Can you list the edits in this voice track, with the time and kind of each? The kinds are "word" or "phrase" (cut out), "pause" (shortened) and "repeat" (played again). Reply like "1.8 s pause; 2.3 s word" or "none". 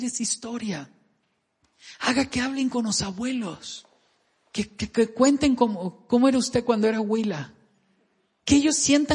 none